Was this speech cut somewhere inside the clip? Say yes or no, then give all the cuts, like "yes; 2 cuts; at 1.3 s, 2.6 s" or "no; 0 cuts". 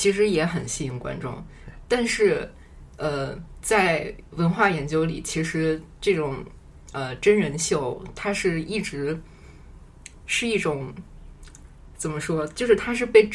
no; 0 cuts